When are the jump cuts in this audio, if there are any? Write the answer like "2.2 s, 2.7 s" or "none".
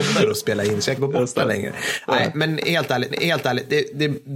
1.0 s, 3.1 s